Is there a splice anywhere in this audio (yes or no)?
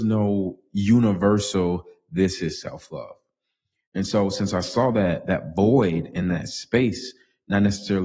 no